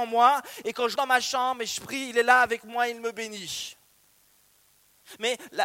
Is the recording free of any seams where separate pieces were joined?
no; 1 cut; at 0.9 s

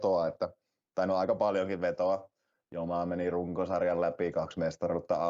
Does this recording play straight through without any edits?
yes; 0 cuts

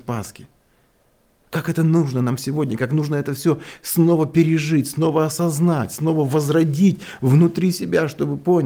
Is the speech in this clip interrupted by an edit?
no; 0 cuts

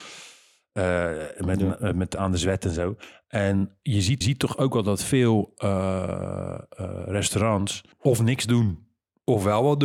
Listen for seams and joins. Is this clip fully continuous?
no; 2 cuts; at 4.2 s, 7.9 s

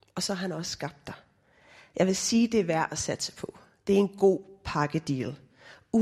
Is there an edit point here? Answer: no; 0 cuts

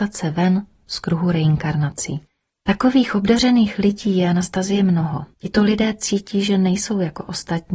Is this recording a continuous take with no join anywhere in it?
no; 2 cuts; at 2.5 s, 5.3 s

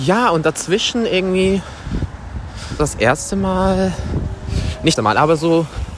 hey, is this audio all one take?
no; 2 cuts; at 2.8 s, 5.0 s

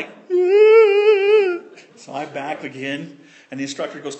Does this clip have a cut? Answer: yes; 2 cuts; at 1.9 s, 2.6 s

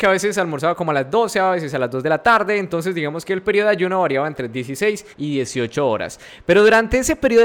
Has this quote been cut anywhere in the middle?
yes; 1 cut; at 5.1 s

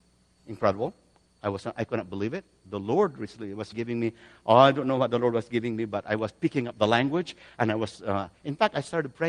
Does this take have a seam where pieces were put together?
yes; 1 cut; at 3.7 s

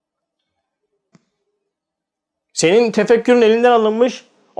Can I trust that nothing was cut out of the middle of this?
yes; 0 cuts

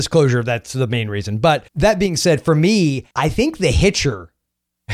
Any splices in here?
yes; 2 cuts; at 1.7 s, 3.1 s

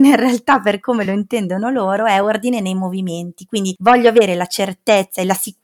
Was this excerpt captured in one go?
yes; 0 cuts

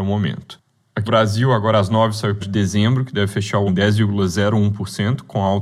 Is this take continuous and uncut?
no; 3 cuts; at 1.1 s, 2.4 s, 3.7 s

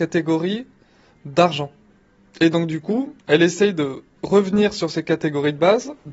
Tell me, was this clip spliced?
yes; 1 cut; at 3.2 s

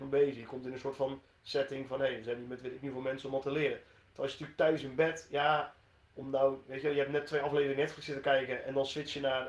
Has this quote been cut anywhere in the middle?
no; 0 cuts

